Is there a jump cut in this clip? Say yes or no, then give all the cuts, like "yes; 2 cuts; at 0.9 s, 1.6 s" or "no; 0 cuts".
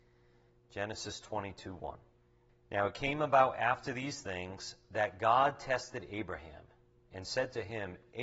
yes; 1 cut; at 2.5 s